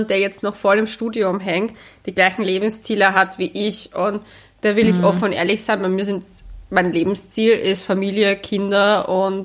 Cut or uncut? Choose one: uncut